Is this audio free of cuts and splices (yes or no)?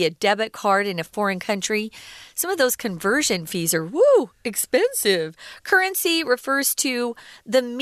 yes